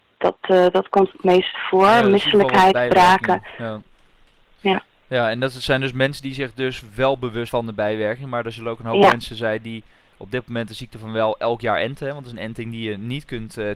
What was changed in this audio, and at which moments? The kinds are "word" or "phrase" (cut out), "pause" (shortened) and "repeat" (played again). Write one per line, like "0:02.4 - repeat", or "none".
0:07.5 - word